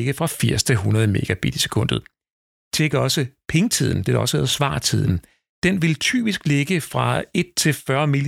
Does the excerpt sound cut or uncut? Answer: uncut